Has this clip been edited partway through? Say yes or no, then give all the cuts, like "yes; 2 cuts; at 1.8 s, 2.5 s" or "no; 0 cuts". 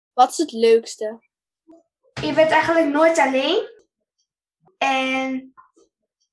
no; 0 cuts